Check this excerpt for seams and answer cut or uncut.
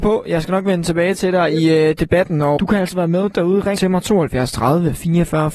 cut